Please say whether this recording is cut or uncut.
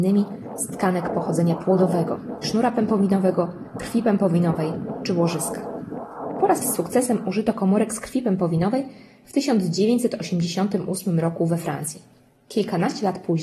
cut